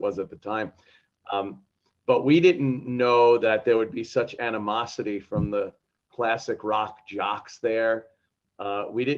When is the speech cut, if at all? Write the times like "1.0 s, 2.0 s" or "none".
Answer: none